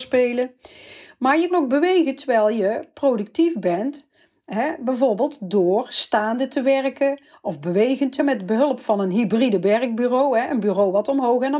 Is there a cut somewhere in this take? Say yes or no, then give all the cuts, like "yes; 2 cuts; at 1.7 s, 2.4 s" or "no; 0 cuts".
yes; 2 cuts; at 1.5 s, 8.2 s